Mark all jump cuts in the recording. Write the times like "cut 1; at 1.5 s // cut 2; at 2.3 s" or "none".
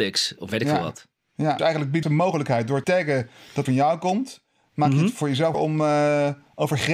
cut 1; at 1.6 s // cut 2; at 2.0 s // cut 3; at 2.8 s // cut 4; at 3.7 s // cut 5; at 5.5 s